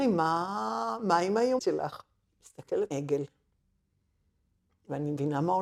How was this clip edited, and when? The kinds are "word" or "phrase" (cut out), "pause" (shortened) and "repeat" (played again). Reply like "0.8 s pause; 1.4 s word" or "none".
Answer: 1.6 s word; 2.9 s phrase